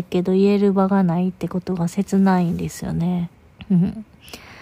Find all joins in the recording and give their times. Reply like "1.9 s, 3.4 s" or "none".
3.3 s